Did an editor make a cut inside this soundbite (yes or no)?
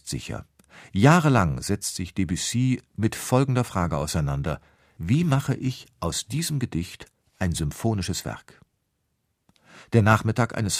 no